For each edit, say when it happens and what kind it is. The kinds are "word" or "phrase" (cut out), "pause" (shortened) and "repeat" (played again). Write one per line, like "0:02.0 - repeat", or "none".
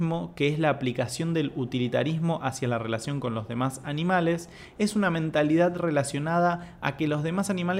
none